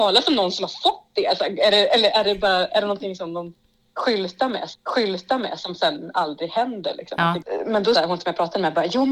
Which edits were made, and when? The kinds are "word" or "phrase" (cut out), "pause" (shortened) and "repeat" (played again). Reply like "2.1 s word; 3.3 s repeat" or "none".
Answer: 2.1 s word; 4.7 s repeat; 7.9 s phrase